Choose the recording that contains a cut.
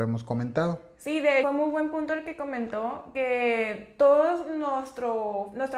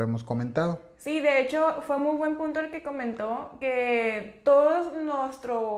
first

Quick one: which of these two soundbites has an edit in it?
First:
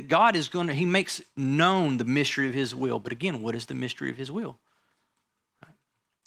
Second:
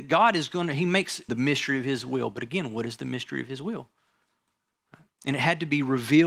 second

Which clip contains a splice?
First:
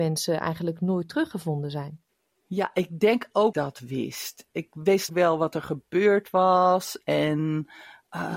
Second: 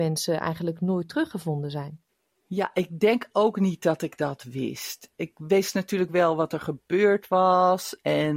first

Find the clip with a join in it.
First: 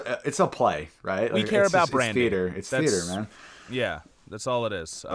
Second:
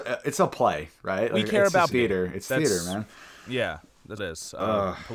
second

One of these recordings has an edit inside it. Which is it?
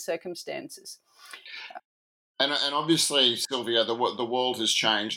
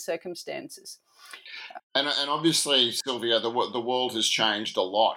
second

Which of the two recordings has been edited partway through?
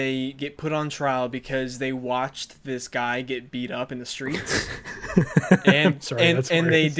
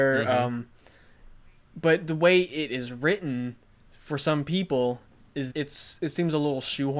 second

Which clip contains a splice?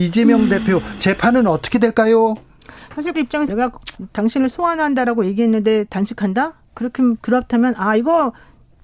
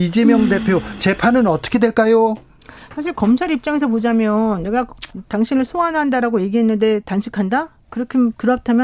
first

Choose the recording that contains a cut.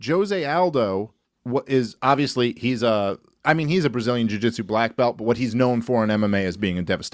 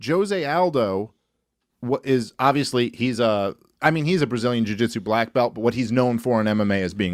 first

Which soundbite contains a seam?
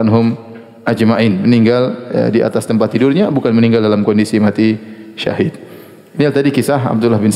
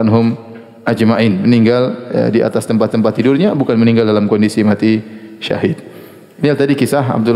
second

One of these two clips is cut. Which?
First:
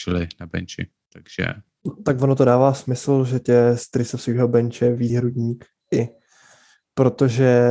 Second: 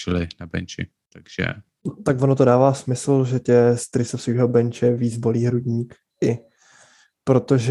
first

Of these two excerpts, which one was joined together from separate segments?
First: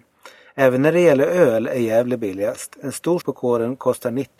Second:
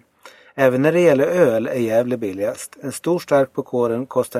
first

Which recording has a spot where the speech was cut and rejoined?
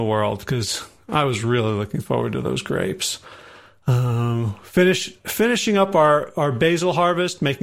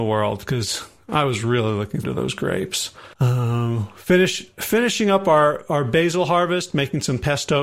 second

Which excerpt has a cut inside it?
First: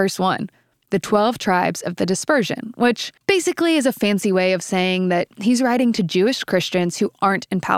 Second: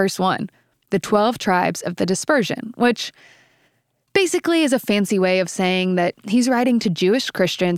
first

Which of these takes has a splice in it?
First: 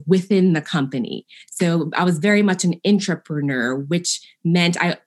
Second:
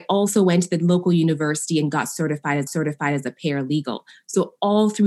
second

